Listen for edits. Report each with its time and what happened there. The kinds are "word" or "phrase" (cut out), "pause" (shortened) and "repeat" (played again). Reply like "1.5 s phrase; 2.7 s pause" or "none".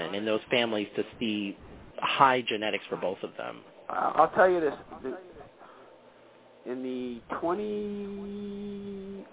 none